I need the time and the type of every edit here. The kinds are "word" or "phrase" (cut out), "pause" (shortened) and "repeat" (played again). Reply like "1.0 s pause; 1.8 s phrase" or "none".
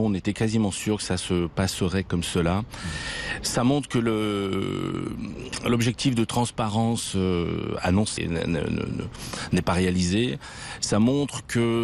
8.2 s word